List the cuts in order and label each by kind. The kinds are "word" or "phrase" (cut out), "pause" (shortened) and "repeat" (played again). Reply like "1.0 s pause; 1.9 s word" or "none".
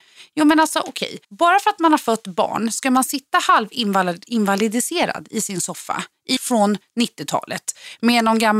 1.2 s pause; 6.4 s word